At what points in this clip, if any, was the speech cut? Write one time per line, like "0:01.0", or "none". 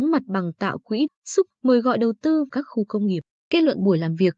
0:01.1
0:01.5
0:02.5